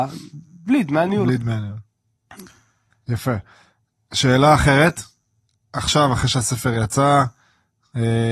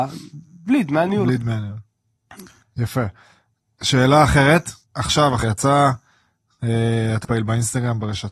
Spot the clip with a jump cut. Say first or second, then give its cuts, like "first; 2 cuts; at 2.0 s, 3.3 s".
second; 4 cuts; at 2.6 s, 4.8 s, 5.4 s, 7.2 s